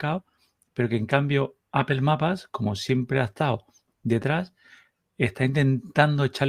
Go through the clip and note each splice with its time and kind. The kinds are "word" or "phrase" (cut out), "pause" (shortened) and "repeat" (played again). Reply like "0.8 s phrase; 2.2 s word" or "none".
none